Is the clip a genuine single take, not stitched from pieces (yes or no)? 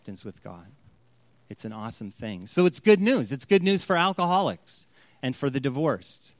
yes